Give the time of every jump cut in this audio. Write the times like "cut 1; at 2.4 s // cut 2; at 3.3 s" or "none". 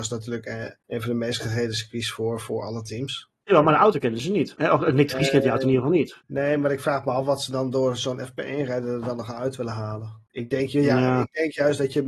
none

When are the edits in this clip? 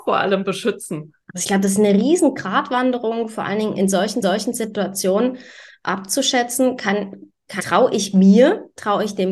cut 1; at 1.2 s // cut 2; at 3.8 s // cut 3; at 4.2 s // cut 4; at 7.6 s

